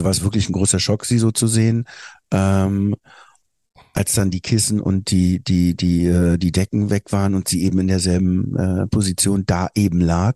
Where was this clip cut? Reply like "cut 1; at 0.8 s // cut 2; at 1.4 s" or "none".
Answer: none

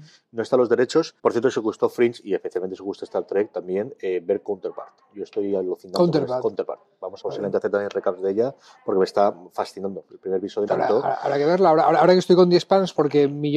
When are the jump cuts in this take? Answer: cut 1; at 1.2 s // cut 2; at 7.2 s // cut 3; at 10.7 s

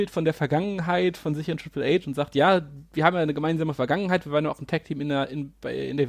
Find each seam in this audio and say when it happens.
none

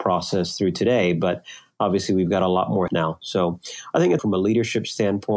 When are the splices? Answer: cut 1; at 2.9 s // cut 2; at 4.2 s

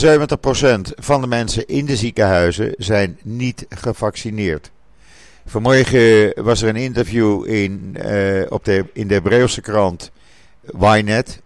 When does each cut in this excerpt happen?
none

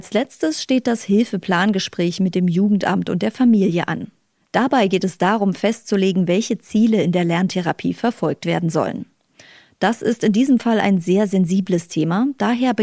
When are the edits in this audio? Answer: none

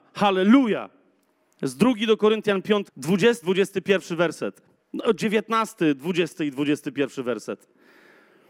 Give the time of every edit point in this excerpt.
cut 1; at 2.9 s // cut 2; at 3.4 s

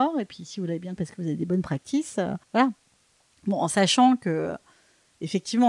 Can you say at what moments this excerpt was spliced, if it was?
cut 1; at 1.0 s // cut 2; at 2.4 s

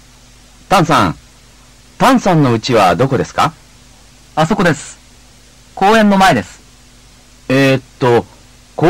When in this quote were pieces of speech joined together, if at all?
none

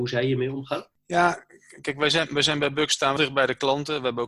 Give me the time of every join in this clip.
cut 1; at 3.2 s

